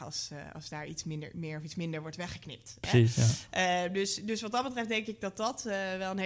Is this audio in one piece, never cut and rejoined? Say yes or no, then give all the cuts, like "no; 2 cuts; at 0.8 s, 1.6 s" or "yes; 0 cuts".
yes; 0 cuts